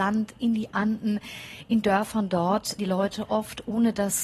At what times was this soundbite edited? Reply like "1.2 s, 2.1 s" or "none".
1.8 s, 2.8 s

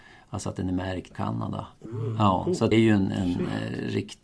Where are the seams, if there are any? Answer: 1.1 s, 1.9 s, 2.7 s

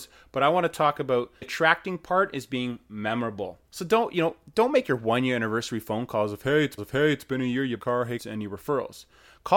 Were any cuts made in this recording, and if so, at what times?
1.4 s, 3.6 s, 6.8 s, 7.8 s, 8.2 s

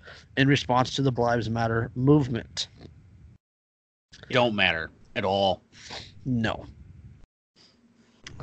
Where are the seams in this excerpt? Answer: 1.2 s, 4.3 s

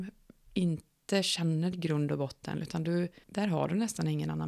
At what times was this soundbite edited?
1.7 s, 2.6 s, 3.2 s

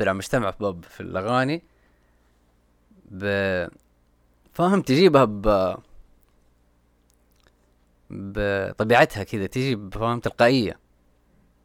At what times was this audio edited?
none

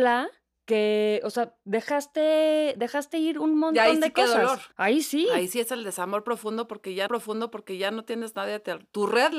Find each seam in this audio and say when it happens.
4.7 s, 7.1 s

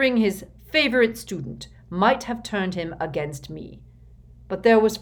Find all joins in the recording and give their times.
none

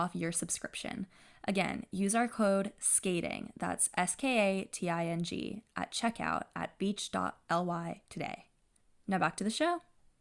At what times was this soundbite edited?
none

